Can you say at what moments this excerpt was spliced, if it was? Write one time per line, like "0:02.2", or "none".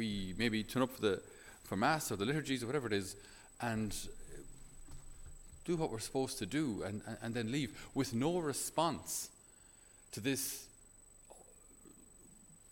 none